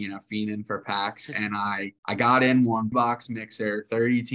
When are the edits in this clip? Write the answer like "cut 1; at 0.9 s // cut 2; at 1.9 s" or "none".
cut 1; at 2.0 s // cut 2; at 2.9 s